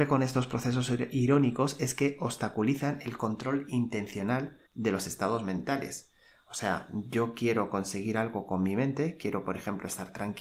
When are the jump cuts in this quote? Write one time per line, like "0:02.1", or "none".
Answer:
0:04.7